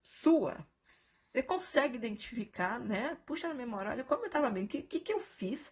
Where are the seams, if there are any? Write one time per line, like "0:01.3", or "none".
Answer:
none